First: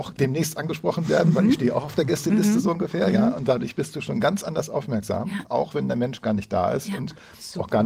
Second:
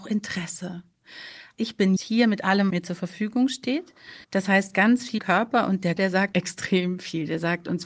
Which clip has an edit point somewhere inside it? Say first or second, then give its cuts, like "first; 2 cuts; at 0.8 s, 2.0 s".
second; 6 cuts; at 2.0 s, 2.7 s, 4.2 s, 5.2 s, 6.0 s, 6.3 s